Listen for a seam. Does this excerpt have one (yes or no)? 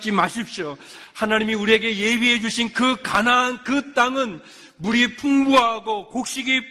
no